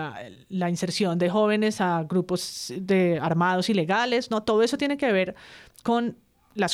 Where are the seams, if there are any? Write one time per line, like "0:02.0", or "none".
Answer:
none